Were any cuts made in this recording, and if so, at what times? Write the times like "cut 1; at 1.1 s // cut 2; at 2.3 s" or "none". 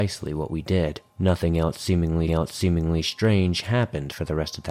cut 1; at 1.1 s // cut 2; at 2.3 s

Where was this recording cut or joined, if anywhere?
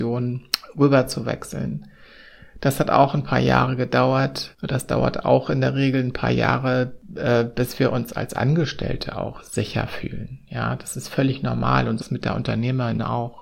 cut 1; at 12.0 s

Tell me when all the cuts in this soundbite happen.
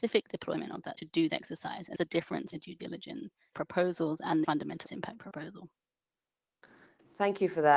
cut 1; at 0.9 s // cut 2; at 1.3 s // cut 3; at 1.9 s // cut 4; at 2.5 s // cut 5; at 3.5 s // cut 6; at 4.4 s // cut 7; at 4.8 s // cut 8; at 5.2 s

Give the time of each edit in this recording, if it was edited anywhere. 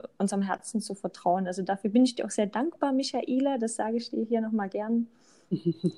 none

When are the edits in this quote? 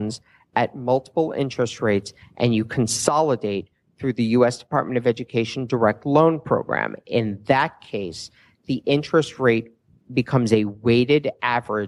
none

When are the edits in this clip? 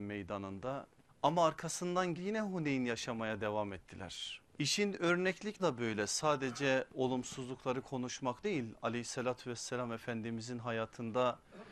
cut 1; at 1.1 s // cut 2; at 2.2 s // cut 3; at 4.5 s // cut 4; at 5.6 s // cut 5; at 8.4 s

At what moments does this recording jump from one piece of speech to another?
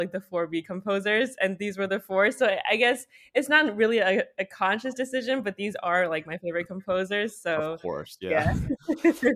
none

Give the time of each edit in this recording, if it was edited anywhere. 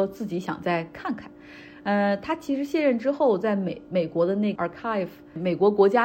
cut 1; at 4.6 s

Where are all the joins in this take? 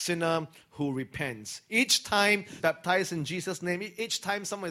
cut 1; at 2.6 s

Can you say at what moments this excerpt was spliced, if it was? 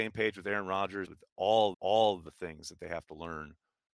cut 1; at 1.1 s // cut 2; at 1.7 s

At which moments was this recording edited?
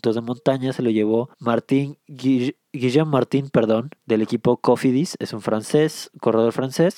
cut 1; at 1.3 s // cut 2; at 4.0 s

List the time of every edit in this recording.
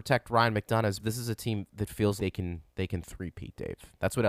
cut 1; at 1.0 s // cut 2; at 2.2 s

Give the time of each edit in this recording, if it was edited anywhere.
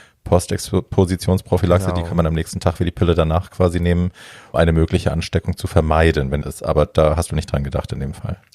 cut 1; at 4.5 s // cut 2; at 6.4 s

